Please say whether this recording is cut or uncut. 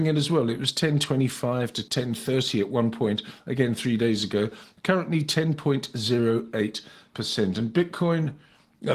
uncut